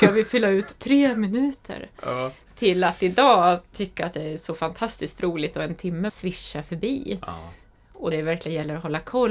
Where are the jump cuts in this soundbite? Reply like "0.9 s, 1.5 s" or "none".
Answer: 6.1 s, 8.1 s